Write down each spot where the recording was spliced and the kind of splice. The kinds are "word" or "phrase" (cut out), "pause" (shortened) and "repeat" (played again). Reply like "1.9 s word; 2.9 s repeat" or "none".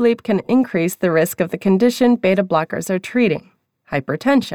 none